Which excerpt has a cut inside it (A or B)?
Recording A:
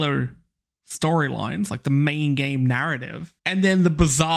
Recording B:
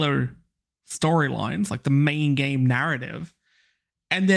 A